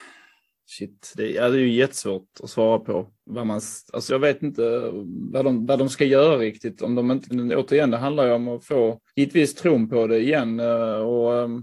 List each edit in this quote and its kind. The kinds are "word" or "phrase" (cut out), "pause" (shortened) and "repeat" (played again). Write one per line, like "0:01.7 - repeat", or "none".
0:03.2 - pause
0:04.1 - word
0:07.3 - phrase
0:09.1 - pause